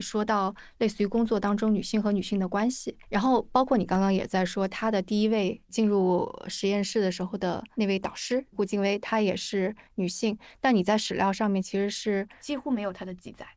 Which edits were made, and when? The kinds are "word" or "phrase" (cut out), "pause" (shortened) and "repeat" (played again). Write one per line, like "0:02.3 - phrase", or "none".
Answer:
0:03.0 - word